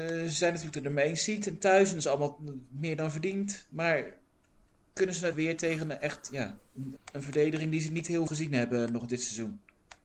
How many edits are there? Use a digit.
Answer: 3